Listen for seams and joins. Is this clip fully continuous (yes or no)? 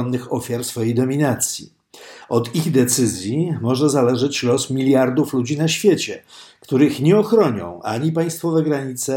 yes